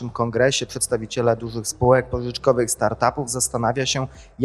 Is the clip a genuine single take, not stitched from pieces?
yes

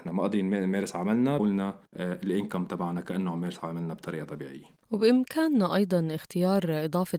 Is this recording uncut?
no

